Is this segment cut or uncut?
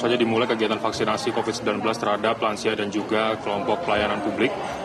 uncut